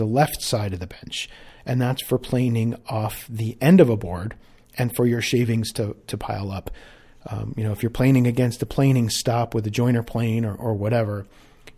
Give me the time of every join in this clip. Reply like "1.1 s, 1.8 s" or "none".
none